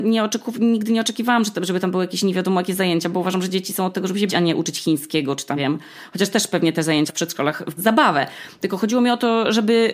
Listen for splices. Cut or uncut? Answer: cut